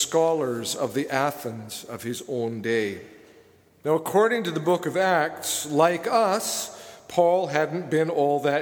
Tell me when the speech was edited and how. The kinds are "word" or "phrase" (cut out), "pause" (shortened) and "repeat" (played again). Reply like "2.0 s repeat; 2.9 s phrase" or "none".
none